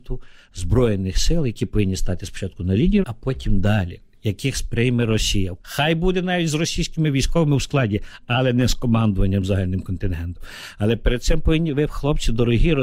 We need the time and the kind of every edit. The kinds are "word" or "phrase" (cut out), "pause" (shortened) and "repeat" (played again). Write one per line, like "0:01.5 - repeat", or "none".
0:03.0 - word
0:05.6 - pause